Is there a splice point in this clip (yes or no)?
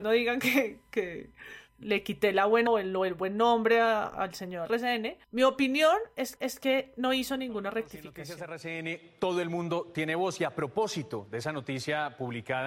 yes